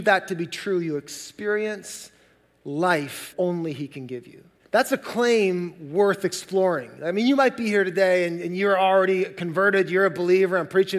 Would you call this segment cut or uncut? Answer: cut